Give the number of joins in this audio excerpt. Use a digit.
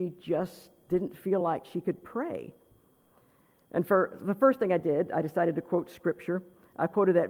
0